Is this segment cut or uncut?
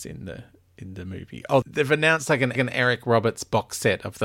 cut